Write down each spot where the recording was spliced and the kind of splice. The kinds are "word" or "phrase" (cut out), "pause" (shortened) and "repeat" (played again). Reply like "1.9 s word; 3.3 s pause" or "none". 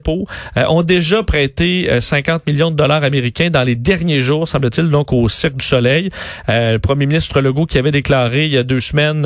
none